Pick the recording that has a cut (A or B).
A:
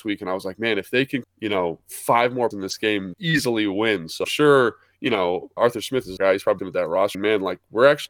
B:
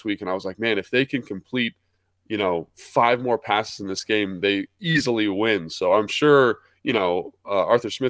A